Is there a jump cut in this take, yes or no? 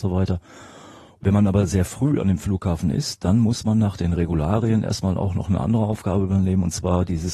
no